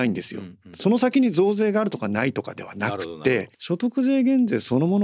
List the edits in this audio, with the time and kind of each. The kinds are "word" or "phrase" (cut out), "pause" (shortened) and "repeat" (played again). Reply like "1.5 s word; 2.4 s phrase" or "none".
3.5 s pause